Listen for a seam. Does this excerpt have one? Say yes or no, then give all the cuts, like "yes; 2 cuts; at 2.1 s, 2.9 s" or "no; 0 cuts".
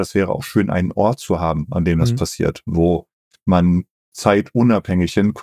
no; 0 cuts